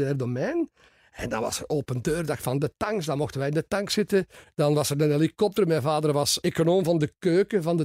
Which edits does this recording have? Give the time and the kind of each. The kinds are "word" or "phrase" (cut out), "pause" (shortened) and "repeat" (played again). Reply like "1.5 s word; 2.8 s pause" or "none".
6.4 s word